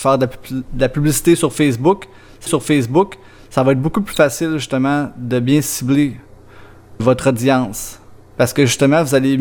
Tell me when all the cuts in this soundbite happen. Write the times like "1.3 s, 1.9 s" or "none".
2.5 s, 7.0 s

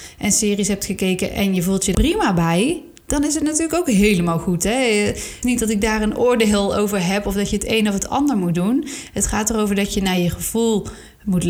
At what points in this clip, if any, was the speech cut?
1.9 s, 5.4 s

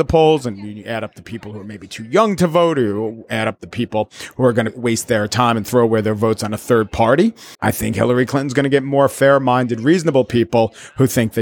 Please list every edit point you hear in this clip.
7.5 s

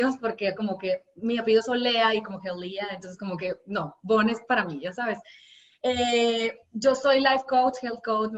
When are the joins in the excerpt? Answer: none

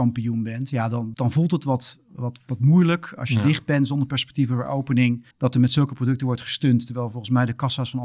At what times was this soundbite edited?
1.1 s, 5.3 s

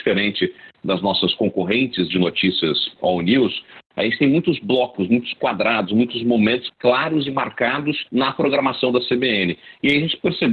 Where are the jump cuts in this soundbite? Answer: 6.7 s, 8.1 s

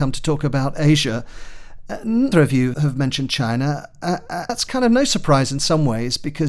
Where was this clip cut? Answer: 2.3 s, 2.7 s, 4.5 s

